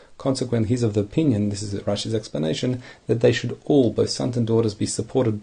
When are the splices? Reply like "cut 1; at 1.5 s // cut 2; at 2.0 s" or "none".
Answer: none